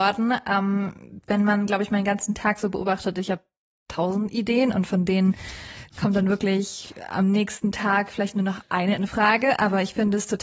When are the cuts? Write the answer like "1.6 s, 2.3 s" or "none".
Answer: none